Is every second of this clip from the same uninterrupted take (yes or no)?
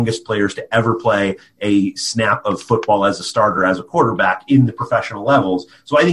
yes